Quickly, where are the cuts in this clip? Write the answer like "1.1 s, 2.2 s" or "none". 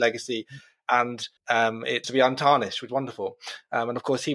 1.4 s, 2.0 s, 2.9 s